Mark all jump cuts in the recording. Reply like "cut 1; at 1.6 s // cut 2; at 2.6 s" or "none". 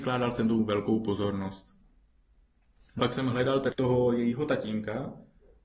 cut 1; at 3.0 s // cut 2; at 3.7 s